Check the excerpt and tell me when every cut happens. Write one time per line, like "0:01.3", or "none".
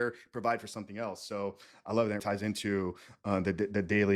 0:02.2